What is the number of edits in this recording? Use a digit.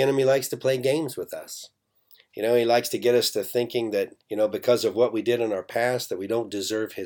1